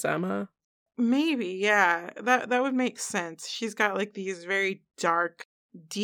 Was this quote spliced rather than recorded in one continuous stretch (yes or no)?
no